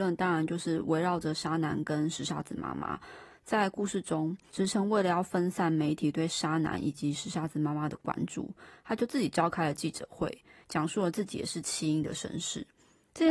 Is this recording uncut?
yes; 0 cuts

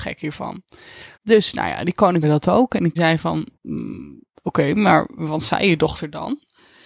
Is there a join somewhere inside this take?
yes; 4 cuts; at 1.1 s, 2.2 s, 3.0 s, 3.5 s

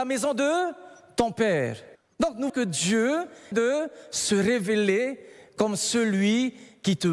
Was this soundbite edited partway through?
yes; 2 cuts; at 2.5 s, 3.5 s

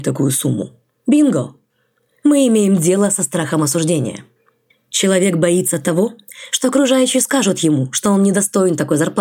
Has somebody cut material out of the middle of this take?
no; 0 cuts

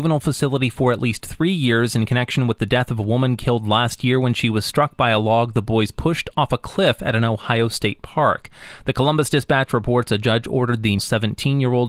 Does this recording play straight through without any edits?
no; 1 cut; at 11.0 s

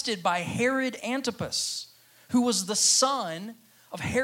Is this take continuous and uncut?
yes; 0 cuts

